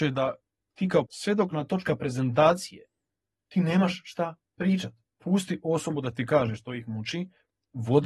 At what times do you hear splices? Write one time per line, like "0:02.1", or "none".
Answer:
0:01.0
0:01.5
0:05.1